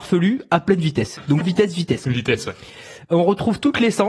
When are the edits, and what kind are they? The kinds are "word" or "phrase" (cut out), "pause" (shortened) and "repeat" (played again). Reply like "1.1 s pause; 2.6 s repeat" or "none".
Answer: 1.4 s word